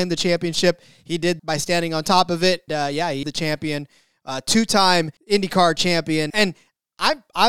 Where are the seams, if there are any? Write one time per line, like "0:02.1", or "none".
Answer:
0:01.4
0:02.7
0:03.2
0:05.2
0:06.3